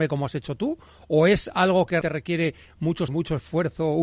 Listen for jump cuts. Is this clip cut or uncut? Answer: cut